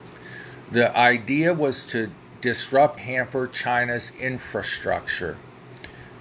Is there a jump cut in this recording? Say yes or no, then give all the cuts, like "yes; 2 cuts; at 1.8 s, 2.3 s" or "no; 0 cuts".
yes; 1 cut; at 3.0 s